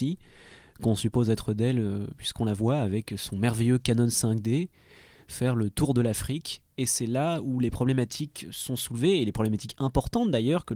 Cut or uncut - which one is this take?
uncut